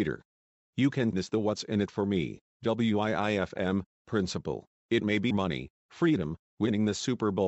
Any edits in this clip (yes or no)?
yes